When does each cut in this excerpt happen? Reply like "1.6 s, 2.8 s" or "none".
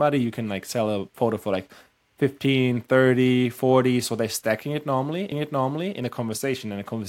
5.3 s